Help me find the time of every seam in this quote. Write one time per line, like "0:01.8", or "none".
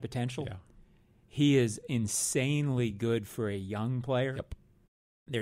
none